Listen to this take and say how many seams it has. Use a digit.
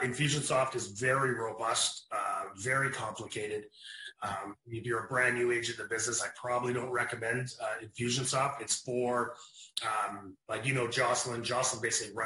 1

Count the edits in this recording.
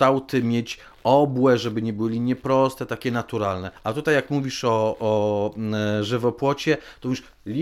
1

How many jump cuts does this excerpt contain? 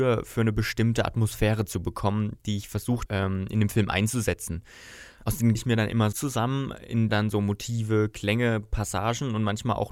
4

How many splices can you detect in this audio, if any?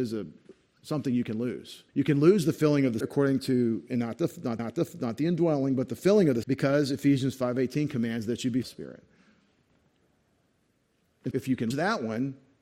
7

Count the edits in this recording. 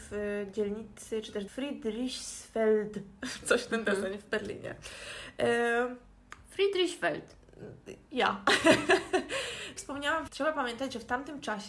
4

